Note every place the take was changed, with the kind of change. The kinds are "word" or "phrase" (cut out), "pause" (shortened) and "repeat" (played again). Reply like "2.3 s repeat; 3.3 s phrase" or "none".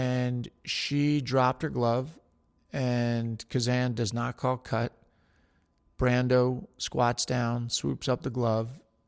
none

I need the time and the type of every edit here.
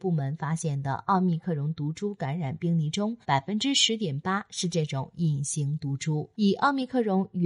3.2 s pause; 6.3 s pause

